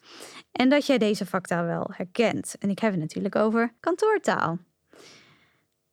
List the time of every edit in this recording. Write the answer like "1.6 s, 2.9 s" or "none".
3.8 s